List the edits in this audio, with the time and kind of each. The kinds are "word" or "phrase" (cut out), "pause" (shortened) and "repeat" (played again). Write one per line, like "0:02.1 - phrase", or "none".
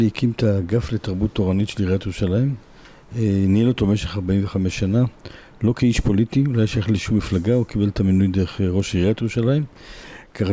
none